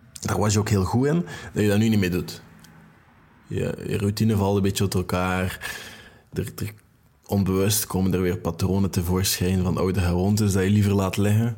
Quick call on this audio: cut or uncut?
uncut